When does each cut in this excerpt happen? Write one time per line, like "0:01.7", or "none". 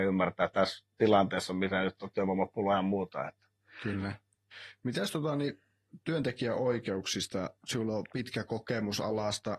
0:04.5
0:07.6

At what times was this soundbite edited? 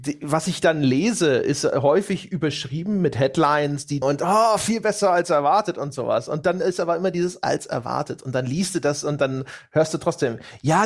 0:04.0

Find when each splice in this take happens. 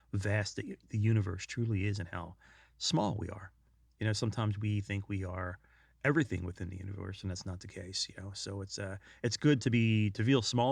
none

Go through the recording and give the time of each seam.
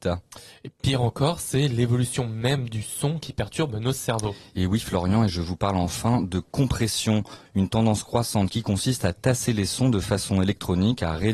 none

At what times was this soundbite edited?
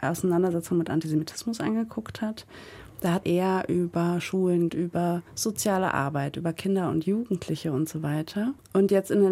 0:03.2
0:04.7
0:05.3

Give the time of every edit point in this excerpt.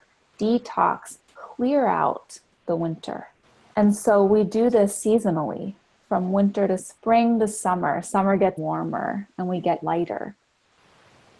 0:01.2
0:03.4
0:06.8
0:08.6
0:09.8

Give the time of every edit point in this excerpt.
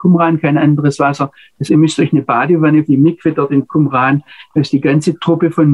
0:01.7
0:02.9

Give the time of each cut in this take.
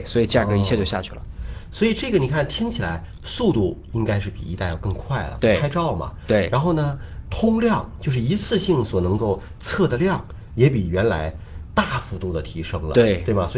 0:07.2

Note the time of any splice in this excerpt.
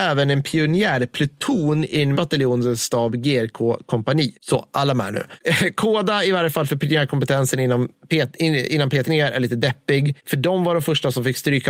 0:02.1
0:09.0

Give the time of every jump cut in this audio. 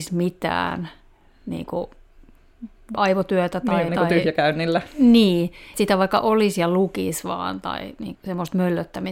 0:03.0
0:03.9
0:05.7
0:08.1

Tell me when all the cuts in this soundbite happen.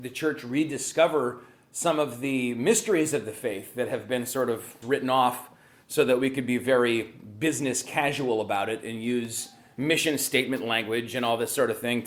0:04.8

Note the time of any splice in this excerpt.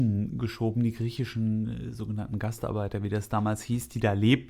none

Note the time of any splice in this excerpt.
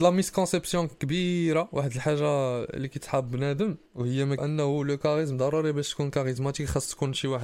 0:03.9
0:04.4

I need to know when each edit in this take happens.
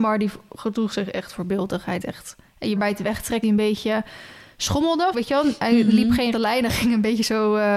0:02.0
0:02.8
0:03.4
0:05.1
0:06.3

